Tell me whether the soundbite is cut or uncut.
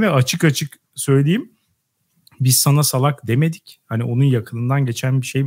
uncut